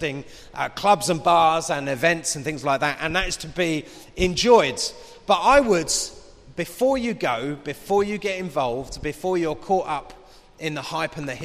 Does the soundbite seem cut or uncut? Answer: uncut